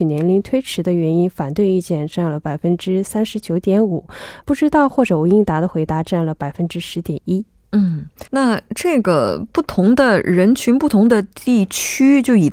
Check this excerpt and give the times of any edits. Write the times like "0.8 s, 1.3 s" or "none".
4.4 s, 8.3 s